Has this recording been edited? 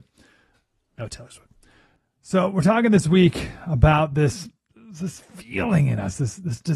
no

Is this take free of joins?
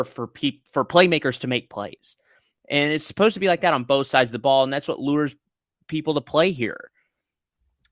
yes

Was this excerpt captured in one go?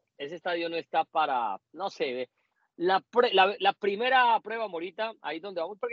yes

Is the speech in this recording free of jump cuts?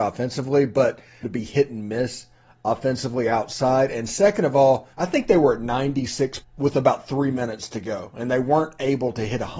no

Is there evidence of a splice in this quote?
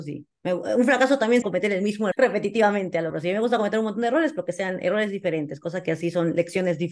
yes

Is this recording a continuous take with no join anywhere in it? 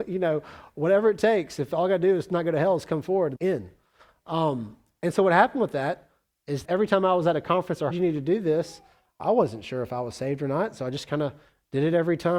no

